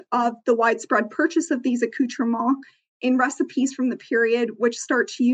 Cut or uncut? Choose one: uncut